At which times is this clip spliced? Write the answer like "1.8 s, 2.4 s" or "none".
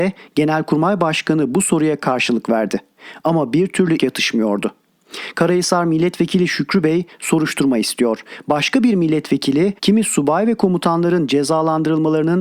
4.0 s, 9.8 s